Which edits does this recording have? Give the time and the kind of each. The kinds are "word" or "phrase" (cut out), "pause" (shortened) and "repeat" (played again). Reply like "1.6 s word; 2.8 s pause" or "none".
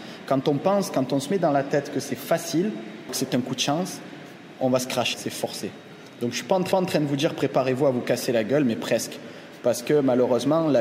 3.1 s word; 5.1 s word; 6.7 s repeat

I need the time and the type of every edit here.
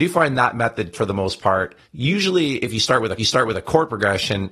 0.9 s word; 1.8 s pause; 3.2 s repeat

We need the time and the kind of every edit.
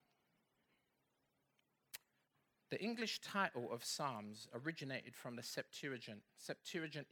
none

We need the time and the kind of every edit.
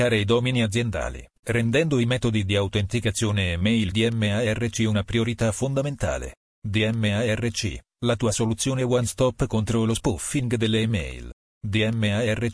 3.9 s word

